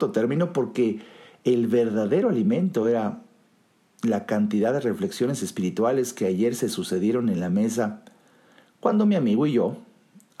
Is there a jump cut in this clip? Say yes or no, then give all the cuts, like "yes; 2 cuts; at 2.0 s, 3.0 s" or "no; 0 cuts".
no; 0 cuts